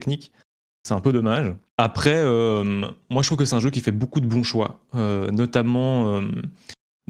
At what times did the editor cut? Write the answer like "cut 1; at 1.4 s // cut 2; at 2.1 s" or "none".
cut 1; at 1.7 s